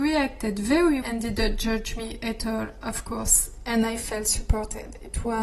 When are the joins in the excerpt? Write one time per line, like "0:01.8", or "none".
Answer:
0:01.0